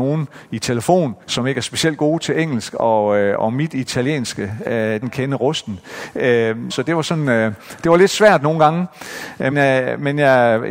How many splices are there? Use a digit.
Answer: 4